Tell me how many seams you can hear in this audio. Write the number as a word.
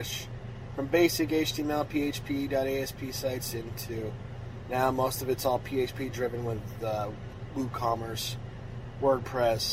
zero